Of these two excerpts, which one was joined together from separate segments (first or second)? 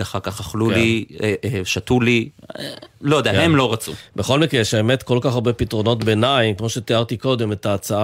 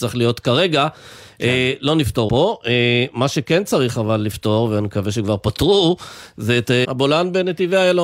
second